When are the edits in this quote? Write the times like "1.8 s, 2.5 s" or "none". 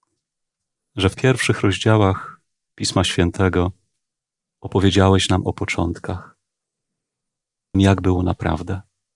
1.1 s, 4.2 s, 7.7 s